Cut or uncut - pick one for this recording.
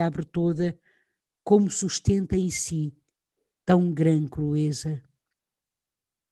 uncut